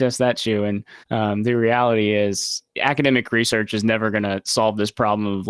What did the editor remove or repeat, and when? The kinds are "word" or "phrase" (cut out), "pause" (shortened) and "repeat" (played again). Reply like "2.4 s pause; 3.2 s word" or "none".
1.0 s pause; 2.7 s pause